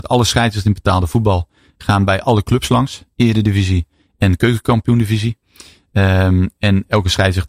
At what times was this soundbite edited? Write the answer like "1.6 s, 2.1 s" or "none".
none